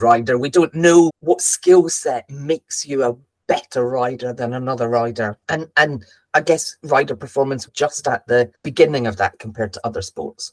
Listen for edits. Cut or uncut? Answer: cut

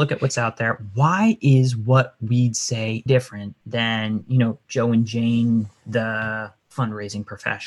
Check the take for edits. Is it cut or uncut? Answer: cut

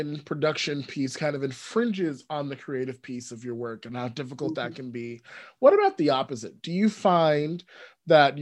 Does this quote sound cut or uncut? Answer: uncut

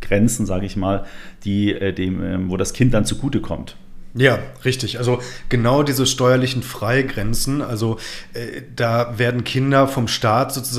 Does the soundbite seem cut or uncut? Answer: uncut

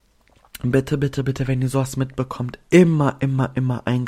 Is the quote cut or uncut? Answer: uncut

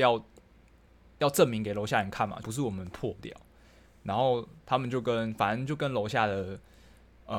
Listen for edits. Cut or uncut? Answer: cut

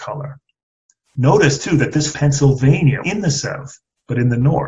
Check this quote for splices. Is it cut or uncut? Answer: cut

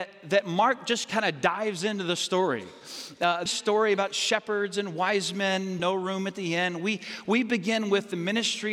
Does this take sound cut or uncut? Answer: cut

